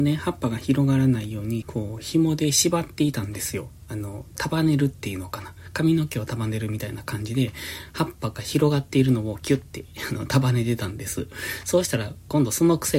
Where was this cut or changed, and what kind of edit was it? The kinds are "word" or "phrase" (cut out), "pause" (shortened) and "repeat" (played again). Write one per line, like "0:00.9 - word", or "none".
0:01.6 - phrase